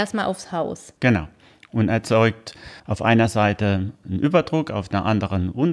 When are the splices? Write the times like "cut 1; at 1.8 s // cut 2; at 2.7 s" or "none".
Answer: cut 1; at 1.0 s // cut 2; at 2.8 s // cut 3; at 4.0 s